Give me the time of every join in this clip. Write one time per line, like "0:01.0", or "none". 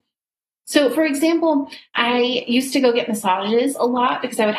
none